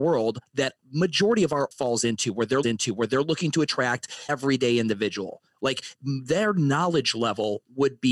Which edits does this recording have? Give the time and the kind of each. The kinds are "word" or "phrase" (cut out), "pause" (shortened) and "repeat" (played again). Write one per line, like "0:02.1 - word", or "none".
0:01.7 - word
0:02.6 - repeat
0:04.3 - word